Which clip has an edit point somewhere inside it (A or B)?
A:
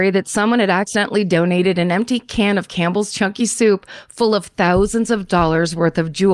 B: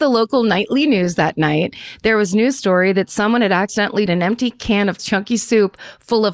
B